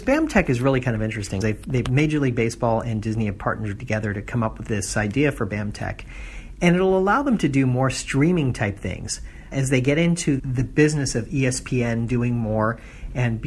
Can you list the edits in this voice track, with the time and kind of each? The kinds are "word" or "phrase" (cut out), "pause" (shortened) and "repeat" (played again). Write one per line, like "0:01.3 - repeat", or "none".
0:01.4 - word
0:01.8 - word
0:04.7 - word
0:09.5 - word
0:10.4 - word